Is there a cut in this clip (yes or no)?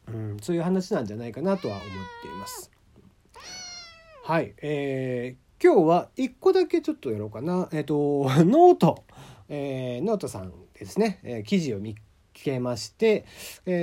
no